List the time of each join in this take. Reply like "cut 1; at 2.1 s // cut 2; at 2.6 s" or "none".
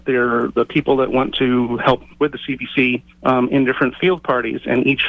cut 1; at 2.1 s // cut 2; at 3.1 s